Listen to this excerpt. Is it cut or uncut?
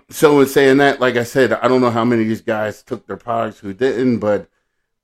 uncut